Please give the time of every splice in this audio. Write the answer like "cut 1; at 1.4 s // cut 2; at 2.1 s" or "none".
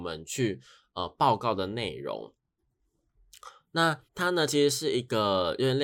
cut 1; at 4.1 s

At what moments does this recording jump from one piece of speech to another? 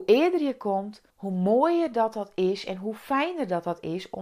cut 1; at 1.1 s

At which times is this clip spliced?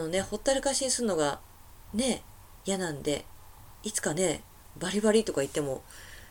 cut 1; at 2.6 s

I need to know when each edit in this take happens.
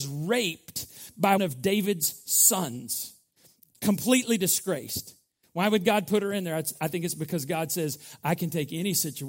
cut 1; at 1.4 s

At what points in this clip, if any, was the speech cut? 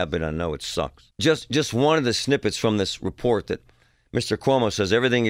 cut 1; at 1.1 s

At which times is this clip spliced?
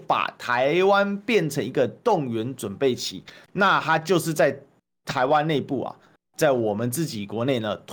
none

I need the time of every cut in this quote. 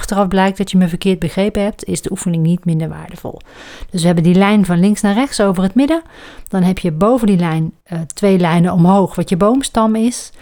cut 1; at 7.8 s

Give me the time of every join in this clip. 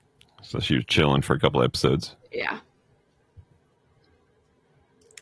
none

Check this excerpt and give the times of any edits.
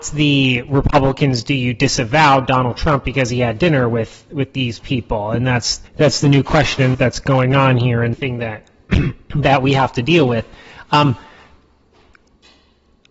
cut 1; at 5.9 s // cut 2; at 6.9 s // cut 3; at 8.1 s

